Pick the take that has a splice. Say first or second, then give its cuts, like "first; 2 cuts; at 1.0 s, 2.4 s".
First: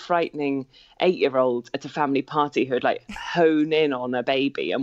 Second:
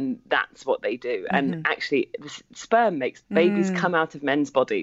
second; 1 cut; at 3.2 s